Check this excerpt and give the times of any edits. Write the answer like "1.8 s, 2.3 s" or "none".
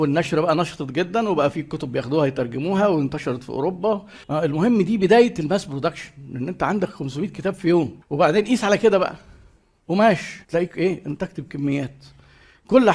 4.2 s, 8.0 s, 10.4 s

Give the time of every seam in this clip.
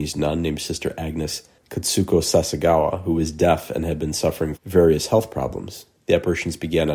1.6 s, 4.6 s

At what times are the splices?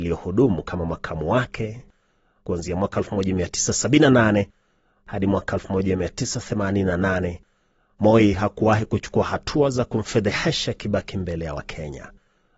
none

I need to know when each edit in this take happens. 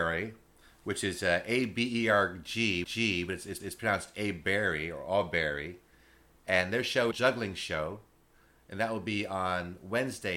2.8 s, 3.6 s, 7.1 s

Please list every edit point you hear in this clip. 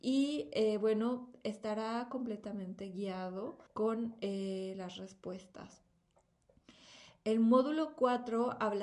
3.7 s

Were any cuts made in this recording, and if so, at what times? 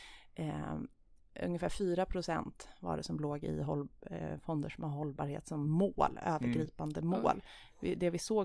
none

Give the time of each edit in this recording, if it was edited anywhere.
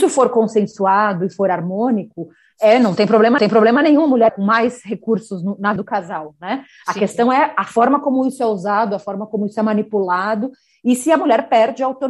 3.4 s, 4.3 s, 5.8 s

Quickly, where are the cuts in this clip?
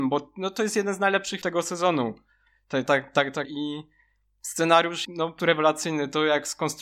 1.4 s, 2.9 s, 3.4 s, 5.0 s, 5.4 s

